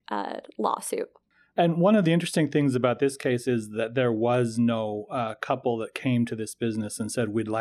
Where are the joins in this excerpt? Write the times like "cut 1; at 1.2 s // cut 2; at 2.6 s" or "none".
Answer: cut 1; at 1.3 s